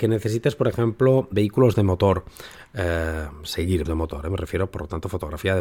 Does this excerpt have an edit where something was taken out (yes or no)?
yes